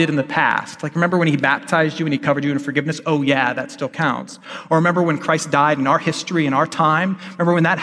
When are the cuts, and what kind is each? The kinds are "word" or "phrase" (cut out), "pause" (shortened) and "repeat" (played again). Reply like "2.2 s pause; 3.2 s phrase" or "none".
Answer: none